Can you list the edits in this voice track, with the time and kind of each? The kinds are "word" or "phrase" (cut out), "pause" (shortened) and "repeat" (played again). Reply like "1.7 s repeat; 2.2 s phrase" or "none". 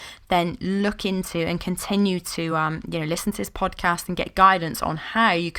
none

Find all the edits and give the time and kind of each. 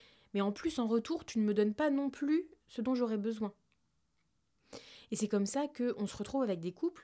none

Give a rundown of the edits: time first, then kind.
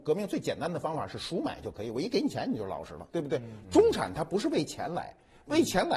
3.1 s pause

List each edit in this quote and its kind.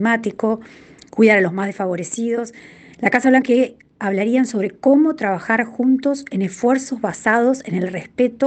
3.4 s word

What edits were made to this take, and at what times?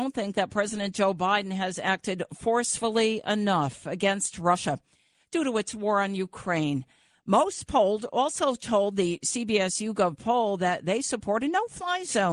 none

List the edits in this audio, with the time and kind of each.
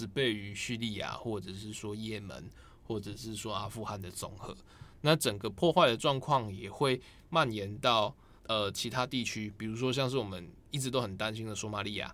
8.4 s pause

